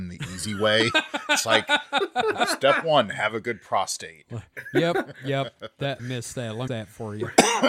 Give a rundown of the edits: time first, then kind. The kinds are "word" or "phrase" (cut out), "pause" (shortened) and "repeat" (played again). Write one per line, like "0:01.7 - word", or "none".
0:06.0 - phrase
0:06.7 - phrase